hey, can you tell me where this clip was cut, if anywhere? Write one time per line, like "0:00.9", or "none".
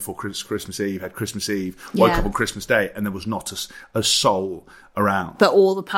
none

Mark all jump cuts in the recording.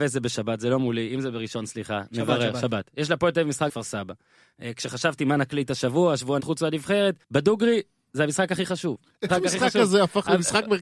0:03.7
0:06.4
0:07.2
0:09.3

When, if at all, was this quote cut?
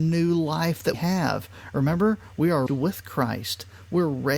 0:00.9
0:02.7

